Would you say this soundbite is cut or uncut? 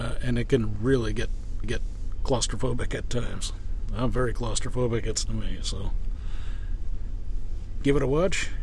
cut